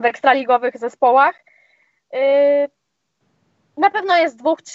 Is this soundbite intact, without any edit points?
yes; 0 cuts

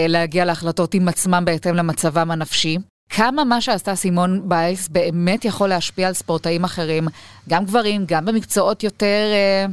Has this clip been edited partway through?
no; 0 cuts

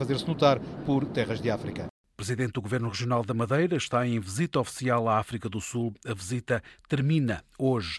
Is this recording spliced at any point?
no; 0 cuts

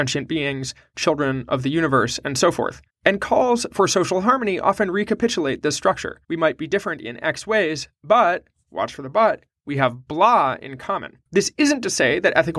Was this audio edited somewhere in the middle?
yes; 3 cuts; at 2.9 s, 6.2 s, 11.3 s

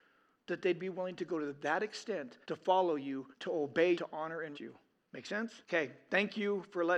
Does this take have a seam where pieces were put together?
yes; 5 cuts; at 2.4 s, 3.3 s, 3.9 s, 4.5 s, 5.6 s

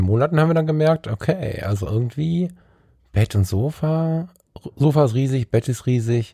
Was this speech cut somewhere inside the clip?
no; 0 cuts

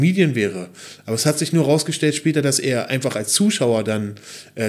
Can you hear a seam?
no; 0 cuts

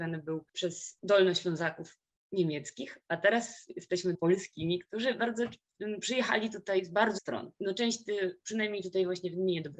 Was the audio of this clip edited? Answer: yes; 2 cuts; at 4.1 s, 7.2 s

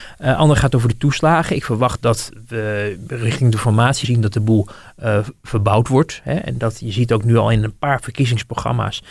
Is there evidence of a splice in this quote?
yes; 1 cut; at 4.0 s

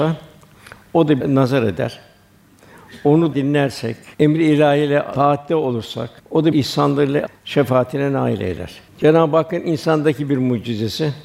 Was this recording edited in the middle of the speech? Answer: yes; 7 cuts; at 1.2 s, 3.3 s, 4.1 s, 6.2 s, 6.5 s, 7.3 s, 8.9 s

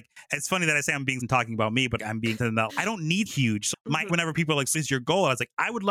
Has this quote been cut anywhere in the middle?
yes; 8 cuts; at 1.2 s, 2.0 s, 2.4 s, 2.7 s, 3.3 s, 3.7 s, 4.1 s, 4.7 s

